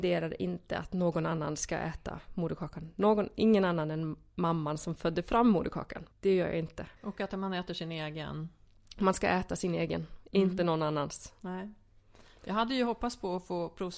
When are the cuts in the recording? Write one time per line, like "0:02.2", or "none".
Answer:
0:06.1
0:07.0